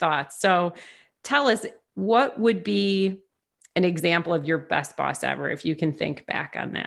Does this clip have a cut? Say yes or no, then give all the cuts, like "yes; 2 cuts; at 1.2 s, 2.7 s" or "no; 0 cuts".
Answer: no; 0 cuts